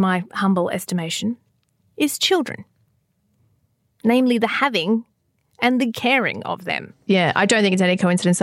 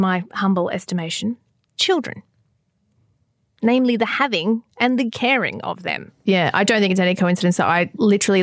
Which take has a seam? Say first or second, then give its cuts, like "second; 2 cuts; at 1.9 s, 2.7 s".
second; 2 cuts; at 1.8 s, 4.7 s